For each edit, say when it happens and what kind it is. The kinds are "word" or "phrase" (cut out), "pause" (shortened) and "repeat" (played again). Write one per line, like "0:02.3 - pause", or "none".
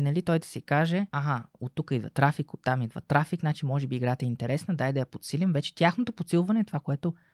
0:01.1 - pause